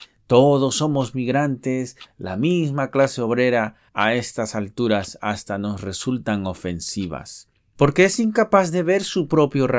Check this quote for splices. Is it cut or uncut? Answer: uncut